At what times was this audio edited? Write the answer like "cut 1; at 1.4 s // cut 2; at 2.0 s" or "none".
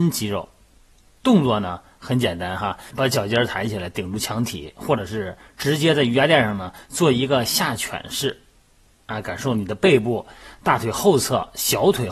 cut 1; at 2.9 s